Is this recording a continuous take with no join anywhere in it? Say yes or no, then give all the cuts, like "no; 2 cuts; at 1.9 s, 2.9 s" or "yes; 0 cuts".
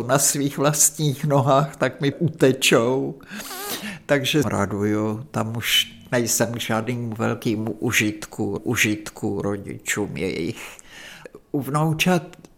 no; 3 cuts; at 2.1 s, 4.4 s, 8.6 s